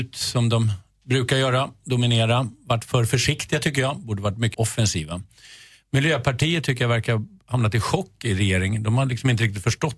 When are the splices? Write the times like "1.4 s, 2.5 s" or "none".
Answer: 2.9 s, 4.5 s